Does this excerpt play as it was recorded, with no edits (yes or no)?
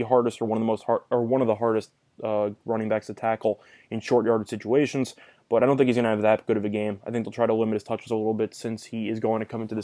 yes